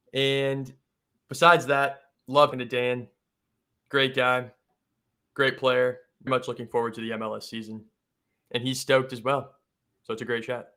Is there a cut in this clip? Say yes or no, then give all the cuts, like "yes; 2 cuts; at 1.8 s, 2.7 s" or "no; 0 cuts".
yes; 2 cuts; at 2.5 s, 6.3 s